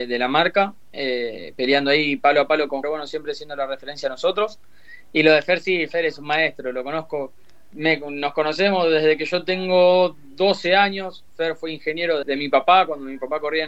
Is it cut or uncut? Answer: cut